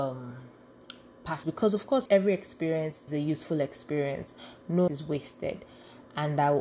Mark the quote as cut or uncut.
cut